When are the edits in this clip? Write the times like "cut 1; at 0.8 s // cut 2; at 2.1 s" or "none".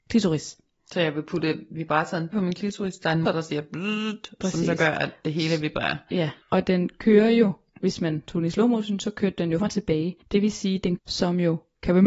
cut 1; at 2.3 s // cut 2; at 3.2 s // cut 3; at 6.4 s // cut 4; at 9.6 s // cut 5; at 10.2 s // cut 6; at 11.0 s